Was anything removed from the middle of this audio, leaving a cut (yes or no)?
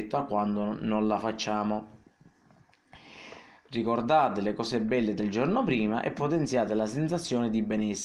no